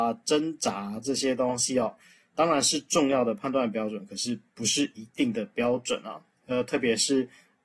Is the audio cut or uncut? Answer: uncut